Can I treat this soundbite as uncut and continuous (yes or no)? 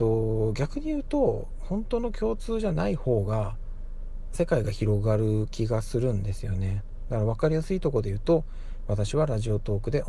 no